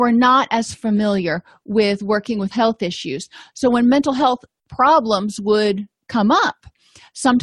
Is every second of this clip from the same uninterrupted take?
no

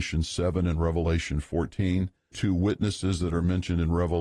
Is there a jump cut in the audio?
yes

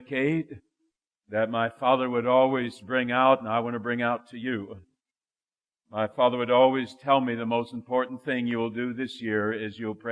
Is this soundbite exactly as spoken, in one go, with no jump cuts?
yes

